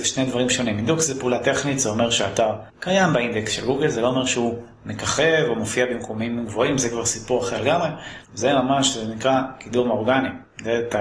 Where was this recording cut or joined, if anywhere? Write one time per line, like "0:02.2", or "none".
0:02.7
0:08.2